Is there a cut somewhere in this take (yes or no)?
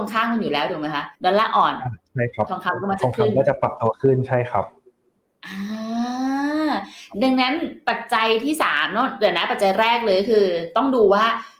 yes